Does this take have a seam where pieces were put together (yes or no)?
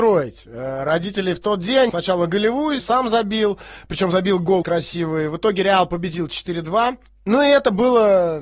yes